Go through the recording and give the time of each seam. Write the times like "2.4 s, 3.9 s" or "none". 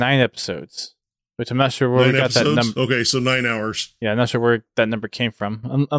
none